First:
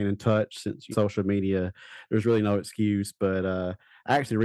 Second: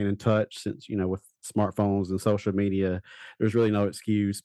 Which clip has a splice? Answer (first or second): first